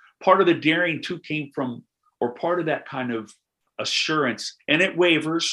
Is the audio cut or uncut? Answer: uncut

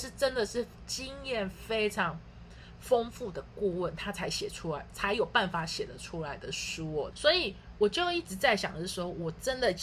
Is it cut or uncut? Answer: cut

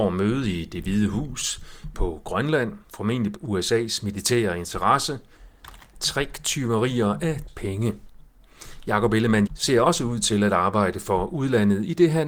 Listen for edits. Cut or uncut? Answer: cut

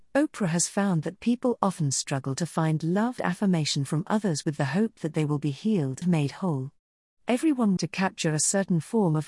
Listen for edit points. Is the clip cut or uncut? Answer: cut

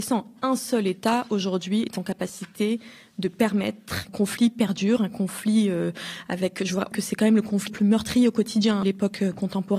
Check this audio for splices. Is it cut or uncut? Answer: cut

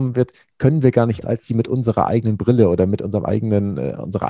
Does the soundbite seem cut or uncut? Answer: cut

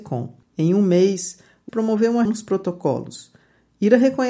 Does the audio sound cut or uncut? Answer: cut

